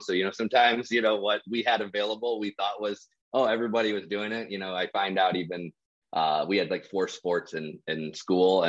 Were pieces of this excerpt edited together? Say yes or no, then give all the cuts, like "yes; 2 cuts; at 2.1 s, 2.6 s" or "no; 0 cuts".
no; 0 cuts